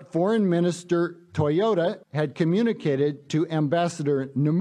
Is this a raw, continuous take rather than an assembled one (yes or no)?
no